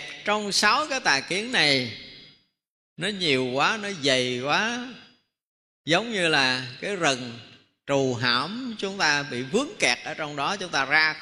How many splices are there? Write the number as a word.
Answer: zero